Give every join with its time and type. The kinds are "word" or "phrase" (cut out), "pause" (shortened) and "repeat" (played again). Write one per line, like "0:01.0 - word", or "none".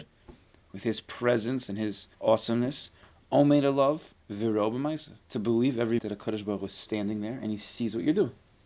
0:02.1 - pause
0:04.2 - pause
0:05.2 - pause
0:06.0 - word